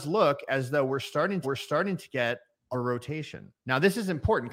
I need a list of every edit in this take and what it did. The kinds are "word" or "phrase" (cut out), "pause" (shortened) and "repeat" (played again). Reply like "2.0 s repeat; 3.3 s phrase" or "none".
1.4 s repeat; 2.7 s phrase